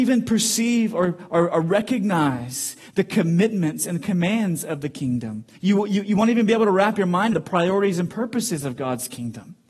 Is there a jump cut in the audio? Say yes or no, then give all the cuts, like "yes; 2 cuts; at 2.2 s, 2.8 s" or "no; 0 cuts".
yes; 2 cuts; at 5.6 s, 7.3 s